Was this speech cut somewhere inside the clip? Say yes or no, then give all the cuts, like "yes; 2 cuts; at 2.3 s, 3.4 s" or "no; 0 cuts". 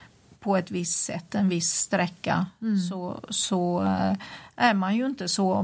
no; 0 cuts